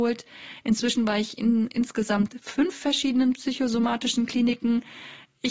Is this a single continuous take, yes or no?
yes